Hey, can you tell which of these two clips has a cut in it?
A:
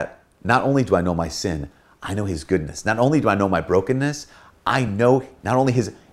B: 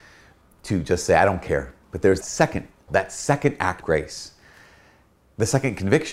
B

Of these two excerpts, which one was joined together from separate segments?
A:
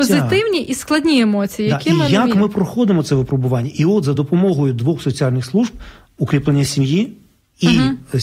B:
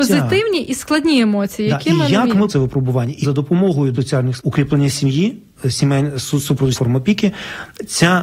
B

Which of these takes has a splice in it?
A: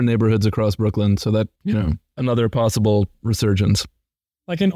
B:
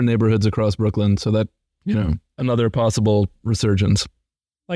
A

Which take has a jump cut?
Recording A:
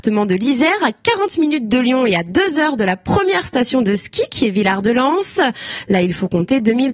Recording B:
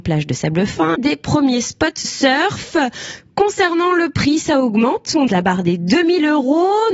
B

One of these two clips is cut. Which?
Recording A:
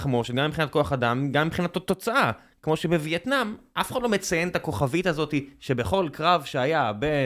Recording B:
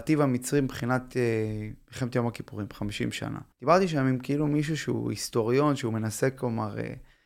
B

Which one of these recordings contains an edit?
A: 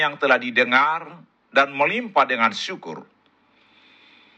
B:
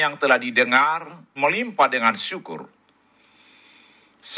B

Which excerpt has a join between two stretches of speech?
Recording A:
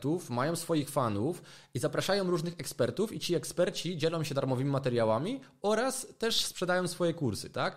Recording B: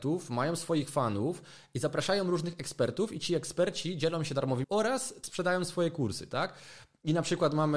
B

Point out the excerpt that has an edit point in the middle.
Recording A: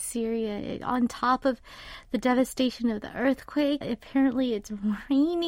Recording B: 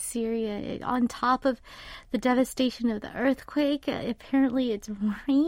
A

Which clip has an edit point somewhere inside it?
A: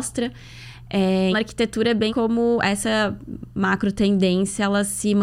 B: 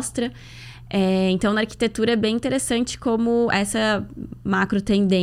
A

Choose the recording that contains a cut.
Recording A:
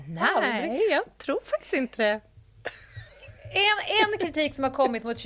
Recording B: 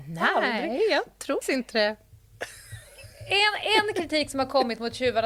B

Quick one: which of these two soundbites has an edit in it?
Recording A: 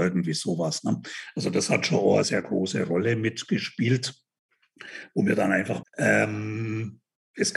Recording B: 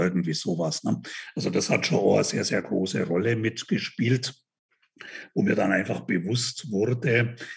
A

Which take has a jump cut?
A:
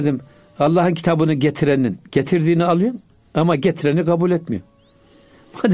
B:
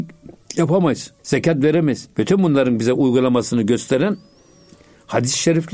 B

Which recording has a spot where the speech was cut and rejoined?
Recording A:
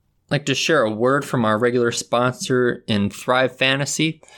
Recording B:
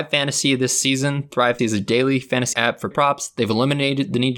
B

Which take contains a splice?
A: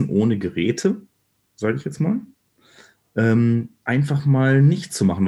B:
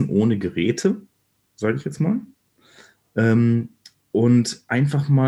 A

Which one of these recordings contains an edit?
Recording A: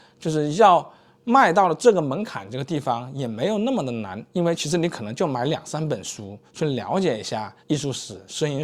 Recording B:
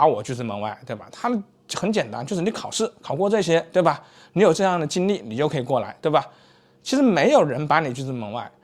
A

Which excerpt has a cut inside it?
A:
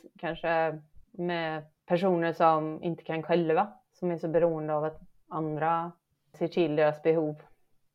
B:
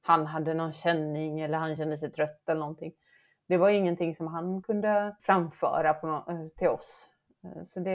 A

